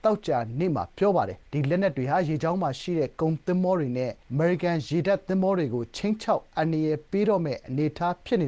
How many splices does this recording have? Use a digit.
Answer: 2